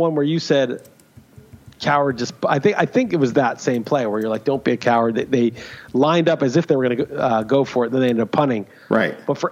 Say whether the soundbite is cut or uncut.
uncut